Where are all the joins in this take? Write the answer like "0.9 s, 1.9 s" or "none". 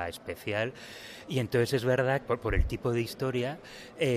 2.2 s